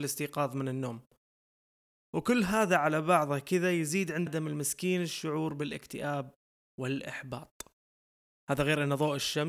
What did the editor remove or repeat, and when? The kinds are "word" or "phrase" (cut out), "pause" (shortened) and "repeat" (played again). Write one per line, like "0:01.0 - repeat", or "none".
0:04.3 - word